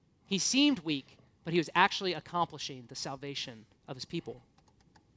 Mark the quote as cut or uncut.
cut